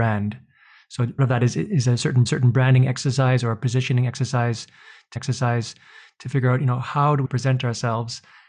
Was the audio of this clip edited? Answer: yes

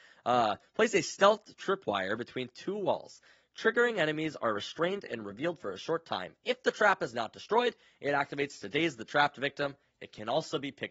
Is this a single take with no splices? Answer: yes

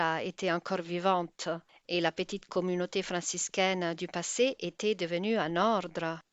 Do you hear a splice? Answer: no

